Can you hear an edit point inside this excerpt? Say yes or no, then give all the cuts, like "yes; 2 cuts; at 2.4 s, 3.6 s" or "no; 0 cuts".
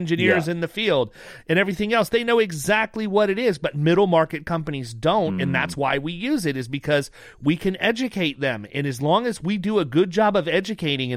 no; 0 cuts